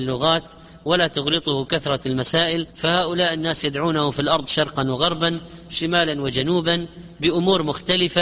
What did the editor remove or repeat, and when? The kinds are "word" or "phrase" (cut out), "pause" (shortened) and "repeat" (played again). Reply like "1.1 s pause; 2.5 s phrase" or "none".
2.7 s pause